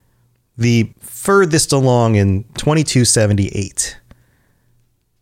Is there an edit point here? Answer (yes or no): yes